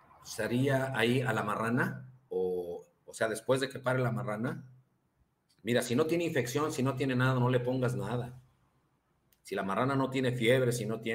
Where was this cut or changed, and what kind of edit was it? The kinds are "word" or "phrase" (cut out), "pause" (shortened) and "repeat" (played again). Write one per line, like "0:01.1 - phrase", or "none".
none